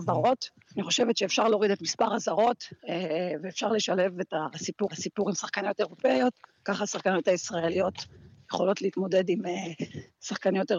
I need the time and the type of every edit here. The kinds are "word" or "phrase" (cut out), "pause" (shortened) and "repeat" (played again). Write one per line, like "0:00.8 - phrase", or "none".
0:02.8 - pause
0:04.9 - repeat